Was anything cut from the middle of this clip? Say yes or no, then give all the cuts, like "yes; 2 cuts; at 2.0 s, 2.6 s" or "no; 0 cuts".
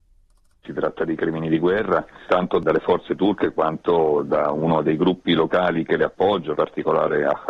yes; 2 cuts; at 2.3 s, 6.5 s